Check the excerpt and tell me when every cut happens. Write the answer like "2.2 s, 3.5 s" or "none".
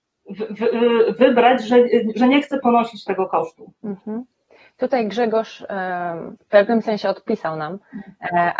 3.8 s, 6.4 s